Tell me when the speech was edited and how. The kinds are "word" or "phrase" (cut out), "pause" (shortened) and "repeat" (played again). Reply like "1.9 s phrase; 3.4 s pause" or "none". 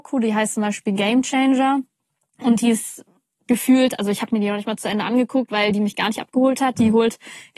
none

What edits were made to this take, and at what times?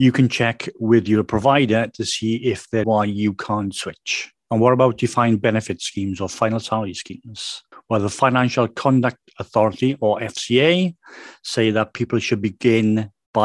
2.8 s phrase; 4.4 s pause; 7.7 s pause

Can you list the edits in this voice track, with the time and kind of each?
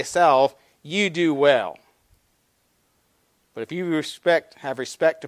none

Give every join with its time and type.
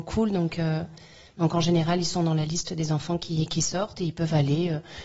none

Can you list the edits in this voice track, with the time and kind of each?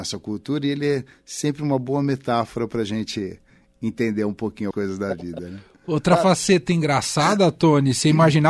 4.7 s word

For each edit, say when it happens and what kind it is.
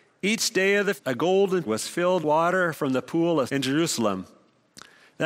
1.0 s word; 1.7 s word; 2.2 s word; 3.5 s word

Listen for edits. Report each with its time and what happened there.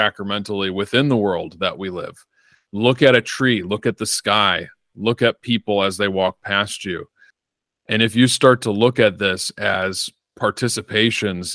none

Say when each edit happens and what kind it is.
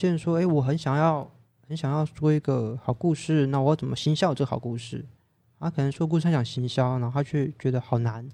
none

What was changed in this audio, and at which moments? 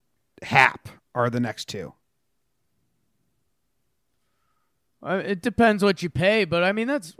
none

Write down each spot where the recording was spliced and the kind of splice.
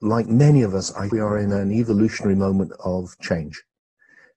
1.1 s word

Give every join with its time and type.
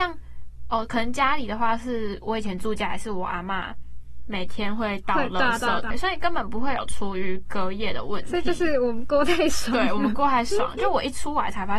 5.9 s word

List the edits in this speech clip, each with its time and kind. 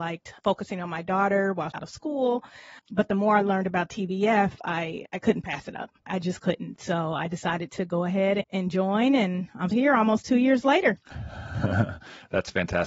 1.7 s phrase; 2.8 s pause; 6.0 s pause; 9.7 s word

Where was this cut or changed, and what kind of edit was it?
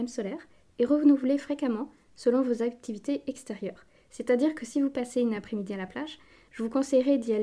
none

